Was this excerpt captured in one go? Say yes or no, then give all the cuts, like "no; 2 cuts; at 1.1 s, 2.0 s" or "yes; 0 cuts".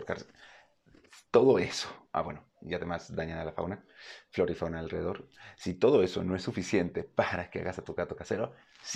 no; 2 cuts; at 2.1 s, 2.5 s